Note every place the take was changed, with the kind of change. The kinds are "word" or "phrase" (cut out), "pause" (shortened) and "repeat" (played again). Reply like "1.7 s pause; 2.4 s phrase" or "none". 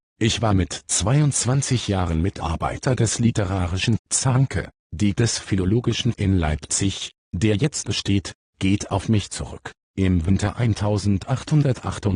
4.0 s word; 5.1 s word; 6.1 s word; 7.8 s word

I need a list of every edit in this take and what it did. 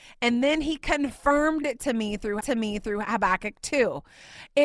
2.4 s repeat

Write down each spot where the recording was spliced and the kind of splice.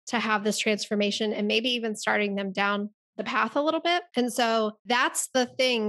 4.1 s pause; 4.8 s pause

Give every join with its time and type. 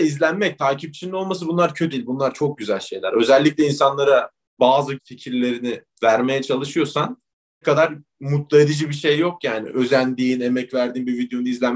1.9 s word; 5.0 s word; 7.6 s word

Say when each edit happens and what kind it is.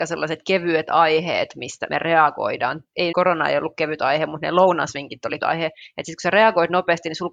1.9 s word; 3.1 s word; 5.4 s word

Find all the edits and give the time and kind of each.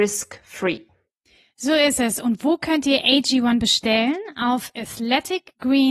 none

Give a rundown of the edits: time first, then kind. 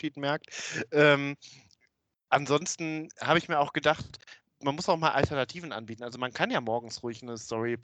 none

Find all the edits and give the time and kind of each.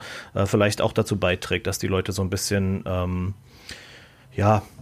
none

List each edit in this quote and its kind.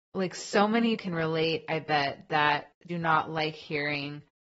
1.0 s word; 2.9 s phrase

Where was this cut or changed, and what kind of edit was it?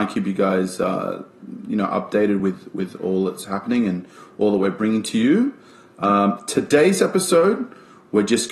none

